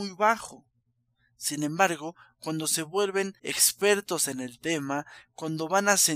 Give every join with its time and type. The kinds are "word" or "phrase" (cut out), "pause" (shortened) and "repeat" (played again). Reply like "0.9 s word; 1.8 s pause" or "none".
3.4 s pause